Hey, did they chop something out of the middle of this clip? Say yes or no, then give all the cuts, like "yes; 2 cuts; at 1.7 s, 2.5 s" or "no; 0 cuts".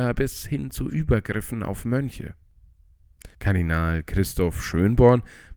yes; 1 cut; at 3.3 s